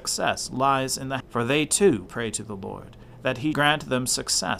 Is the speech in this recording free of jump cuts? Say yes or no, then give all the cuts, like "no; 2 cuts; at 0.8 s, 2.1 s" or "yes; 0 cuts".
no; 3 cuts; at 1.2 s, 2.1 s, 3.5 s